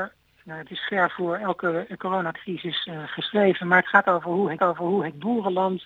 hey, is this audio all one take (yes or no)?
no